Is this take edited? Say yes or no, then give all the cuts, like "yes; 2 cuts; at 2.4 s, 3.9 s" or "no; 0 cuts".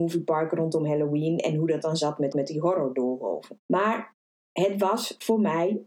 yes; 2 cuts; at 2.3 s, 3.6 s